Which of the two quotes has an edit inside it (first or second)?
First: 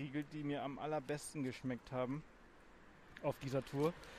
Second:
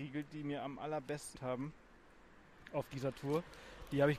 second